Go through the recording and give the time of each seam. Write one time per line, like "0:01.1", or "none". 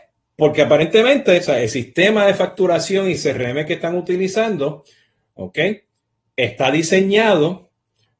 none